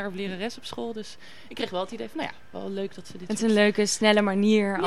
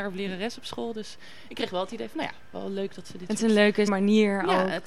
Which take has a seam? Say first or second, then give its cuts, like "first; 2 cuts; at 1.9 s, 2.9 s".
second; 1 cut; at 3.9 s